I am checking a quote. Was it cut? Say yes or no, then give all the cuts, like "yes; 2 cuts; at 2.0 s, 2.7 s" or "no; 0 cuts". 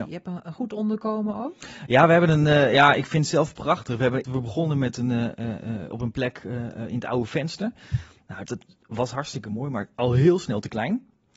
yes; 2 cuts; at 4.2 s, 8.5 s